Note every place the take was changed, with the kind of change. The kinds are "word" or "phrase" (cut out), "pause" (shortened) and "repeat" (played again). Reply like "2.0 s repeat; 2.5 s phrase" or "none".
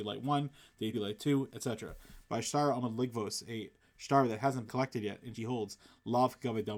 0.9 s word; 4.7 s word; 5.3 s word